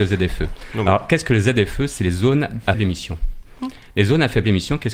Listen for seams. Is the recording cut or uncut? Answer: cut